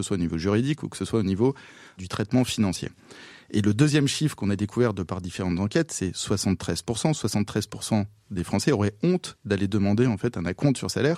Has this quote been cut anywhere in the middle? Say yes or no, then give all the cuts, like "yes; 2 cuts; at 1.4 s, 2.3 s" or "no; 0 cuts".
no; 0 cuts